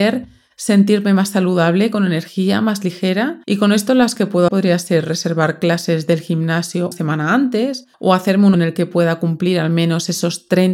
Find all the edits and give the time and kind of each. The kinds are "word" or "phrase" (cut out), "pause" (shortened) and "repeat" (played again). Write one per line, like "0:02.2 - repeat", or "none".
0:03.4 - pause
0:04.2 - word
0:04.5 - word
0:06.9 - word
0:07.9 - pause
0:08.5 - word